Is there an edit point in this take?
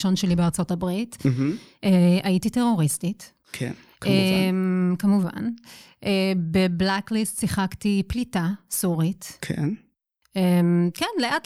yes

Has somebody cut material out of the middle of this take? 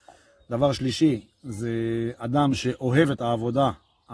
no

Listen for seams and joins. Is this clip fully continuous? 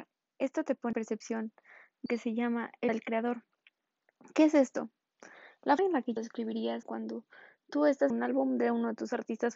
no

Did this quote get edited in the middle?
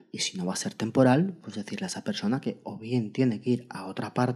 no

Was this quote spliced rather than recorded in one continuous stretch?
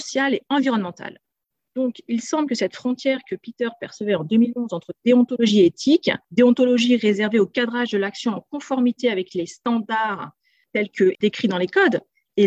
no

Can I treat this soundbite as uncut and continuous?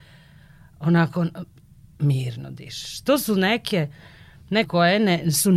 no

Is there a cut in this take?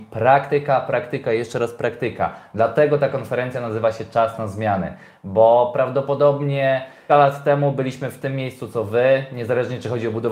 yes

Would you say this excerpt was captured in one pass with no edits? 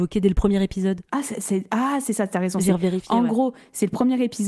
no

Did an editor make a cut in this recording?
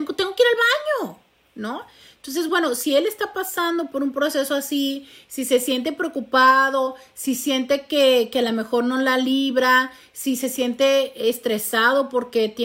no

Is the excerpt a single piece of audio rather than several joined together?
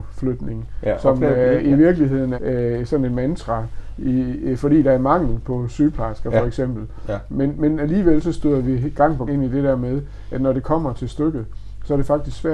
no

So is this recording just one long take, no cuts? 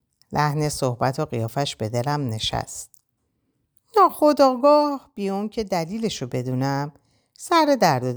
yes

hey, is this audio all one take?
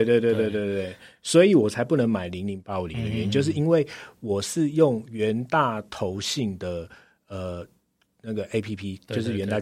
yes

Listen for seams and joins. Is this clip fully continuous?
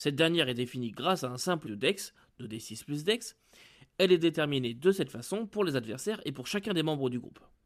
no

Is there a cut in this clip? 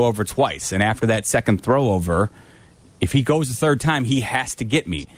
no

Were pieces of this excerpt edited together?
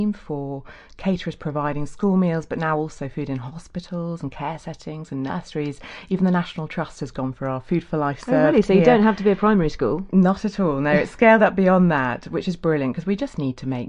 no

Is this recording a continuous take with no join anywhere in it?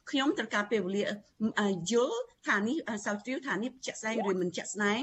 yes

